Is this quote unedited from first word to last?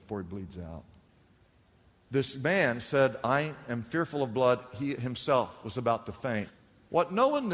yes; 0 cuts

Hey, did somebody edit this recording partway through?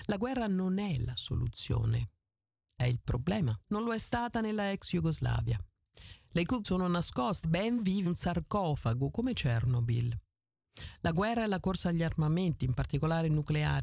yes; 4 cuts; at 3.6 s, 6.6 s, 7.4 s, 8.1 s

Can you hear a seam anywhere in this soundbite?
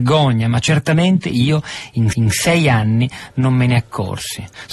yes; 1 cut; at 2.1 s

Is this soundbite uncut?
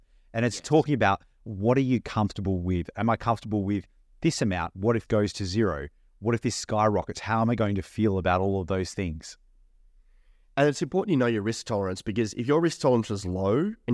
no; 1 cut; at 5.1 s

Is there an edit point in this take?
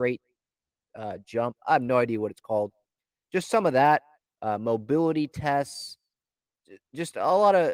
no; 0 cuts

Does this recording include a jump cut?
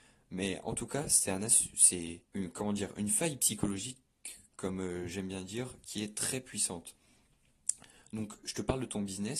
yes; 1 cut; at 2.2 s

